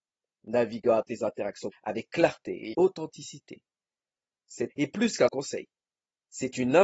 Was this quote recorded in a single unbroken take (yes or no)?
no